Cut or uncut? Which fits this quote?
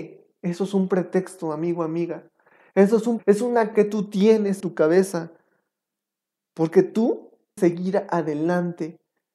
cut